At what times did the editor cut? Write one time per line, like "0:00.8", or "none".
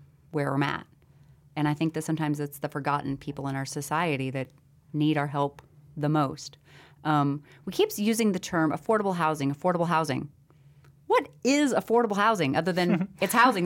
none